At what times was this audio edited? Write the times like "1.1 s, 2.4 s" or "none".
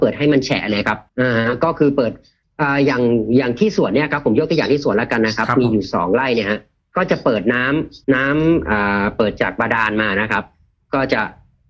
1.1 s, 8.0 s